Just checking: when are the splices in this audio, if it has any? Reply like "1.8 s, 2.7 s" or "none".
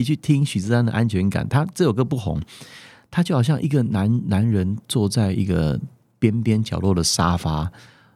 none